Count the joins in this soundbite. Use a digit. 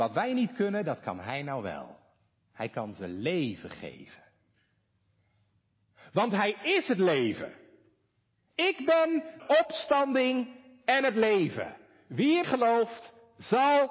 2